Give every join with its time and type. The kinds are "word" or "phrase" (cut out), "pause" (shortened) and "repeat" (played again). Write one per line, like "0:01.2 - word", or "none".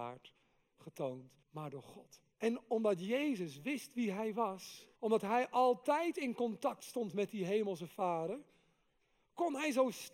0:01.4 - pause
0:02.3 - pause
0:05.0 - pause